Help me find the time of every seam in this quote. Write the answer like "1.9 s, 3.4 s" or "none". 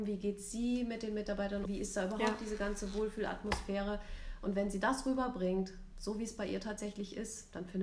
1.7 s